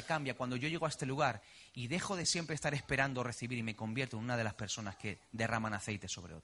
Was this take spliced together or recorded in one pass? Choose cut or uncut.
uncut